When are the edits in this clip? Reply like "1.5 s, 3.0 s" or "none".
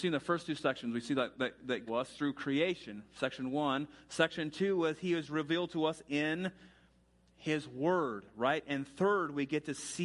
1.9 s